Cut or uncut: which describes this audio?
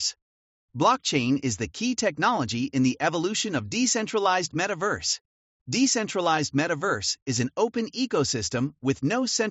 uncut